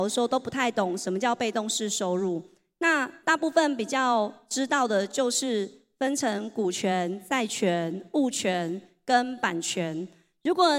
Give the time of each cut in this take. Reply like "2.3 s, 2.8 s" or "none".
none

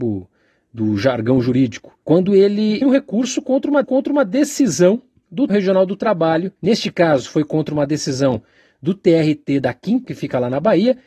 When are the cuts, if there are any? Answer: 2.0 s, 2.8 s, 3.8 s, 5.5 s, 6.6 s, 10.0 s

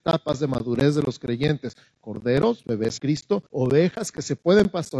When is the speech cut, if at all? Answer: 3.0 s, 3.5 s

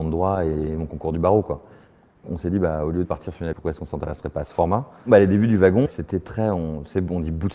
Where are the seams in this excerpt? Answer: 2.2 s, 3.0 s, 3.5 s, 5.9 s

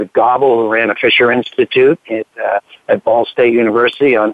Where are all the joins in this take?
none

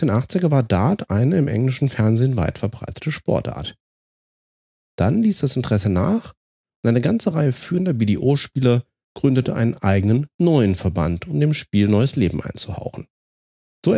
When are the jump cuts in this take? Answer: none

